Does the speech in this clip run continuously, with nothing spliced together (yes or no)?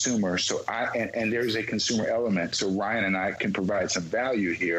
yes